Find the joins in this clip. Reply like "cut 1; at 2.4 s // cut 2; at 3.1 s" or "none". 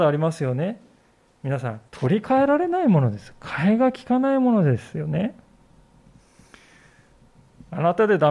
cut 1; at 1.9 s